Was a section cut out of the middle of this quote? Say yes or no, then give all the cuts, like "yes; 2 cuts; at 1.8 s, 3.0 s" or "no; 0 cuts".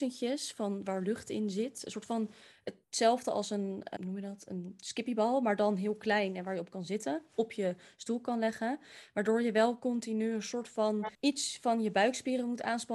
yes; 2 cuts; at 4.0 s, 11.1 s